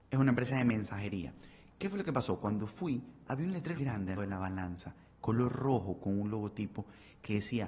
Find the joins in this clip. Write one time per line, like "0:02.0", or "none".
0:03.7
0:04.2